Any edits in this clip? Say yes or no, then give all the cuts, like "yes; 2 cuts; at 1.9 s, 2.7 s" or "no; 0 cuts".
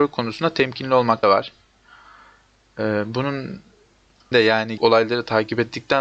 yes; 3 cuts; at 1.2 s, 4.3 s, 4.8 s